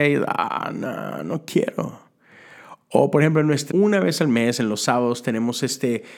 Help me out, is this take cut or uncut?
cut